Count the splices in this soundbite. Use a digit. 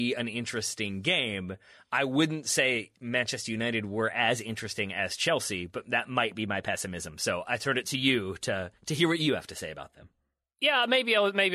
0